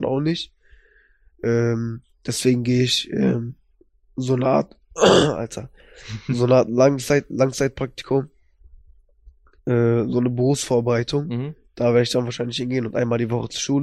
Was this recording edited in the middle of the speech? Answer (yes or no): no